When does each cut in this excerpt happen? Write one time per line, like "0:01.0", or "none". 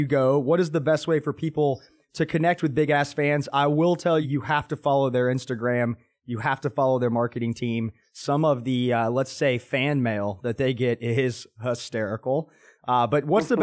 0:04.2